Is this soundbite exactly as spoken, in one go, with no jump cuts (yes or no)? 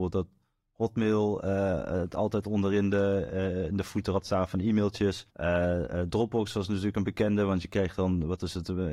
no